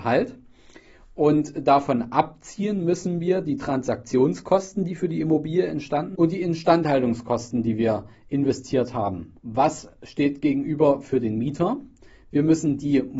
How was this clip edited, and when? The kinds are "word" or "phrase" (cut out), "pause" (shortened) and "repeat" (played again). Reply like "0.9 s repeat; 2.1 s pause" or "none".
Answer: 6.1 s word; 9.4 s pause